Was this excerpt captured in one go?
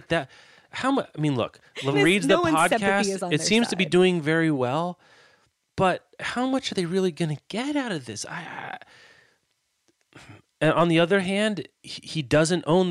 no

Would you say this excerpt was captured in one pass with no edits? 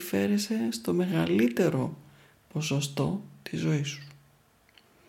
yes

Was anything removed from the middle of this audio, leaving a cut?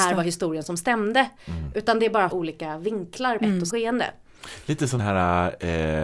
yes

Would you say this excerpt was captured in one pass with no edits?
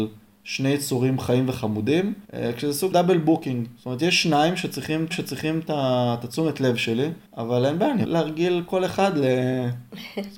no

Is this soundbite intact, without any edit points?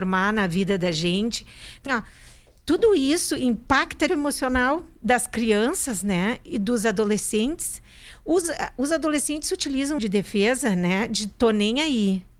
no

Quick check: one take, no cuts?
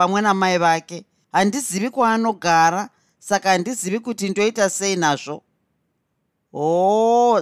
yes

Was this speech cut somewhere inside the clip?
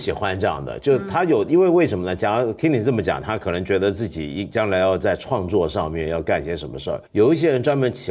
yes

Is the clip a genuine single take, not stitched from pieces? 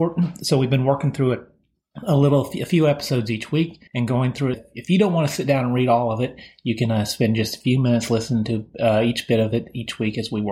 no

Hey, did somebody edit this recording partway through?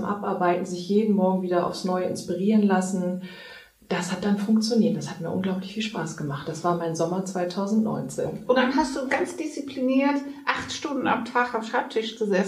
no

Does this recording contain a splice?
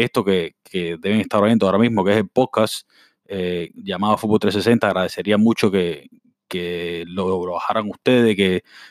no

